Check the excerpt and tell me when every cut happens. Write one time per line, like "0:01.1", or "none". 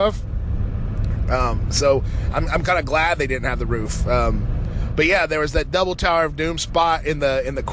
none